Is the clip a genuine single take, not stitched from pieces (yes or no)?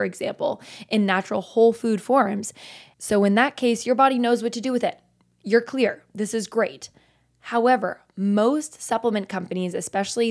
yes